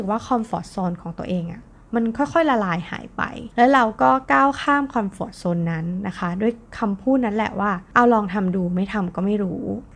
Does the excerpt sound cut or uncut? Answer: uncut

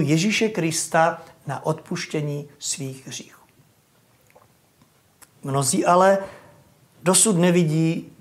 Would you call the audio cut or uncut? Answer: uncut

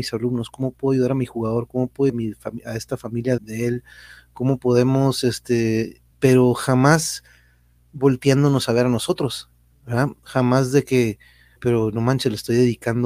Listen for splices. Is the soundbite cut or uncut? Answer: cut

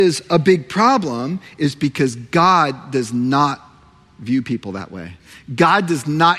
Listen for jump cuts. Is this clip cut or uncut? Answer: uncut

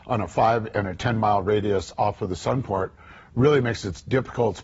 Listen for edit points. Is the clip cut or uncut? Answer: uncut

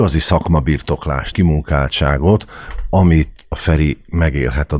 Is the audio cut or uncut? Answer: cut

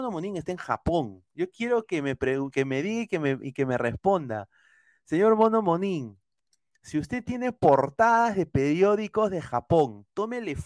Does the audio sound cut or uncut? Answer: uncut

